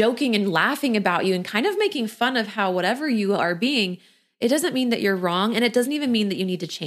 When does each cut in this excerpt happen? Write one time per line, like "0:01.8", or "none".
none